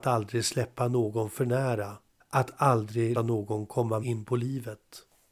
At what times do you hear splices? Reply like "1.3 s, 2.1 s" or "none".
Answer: 2.2 s, 3.1 s, 4.0 s